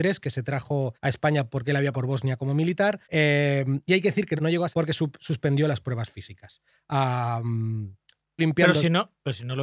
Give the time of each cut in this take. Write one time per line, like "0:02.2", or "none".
0:00.9
0:01.9
0:03.0
0:04.4
0:04.7
0:08.4